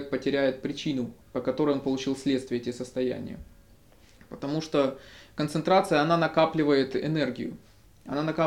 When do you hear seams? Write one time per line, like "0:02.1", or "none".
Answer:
0:01.2